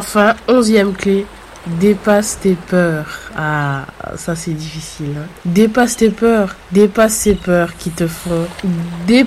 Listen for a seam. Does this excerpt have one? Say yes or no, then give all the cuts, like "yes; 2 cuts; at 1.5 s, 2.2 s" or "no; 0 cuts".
no; 0 cuts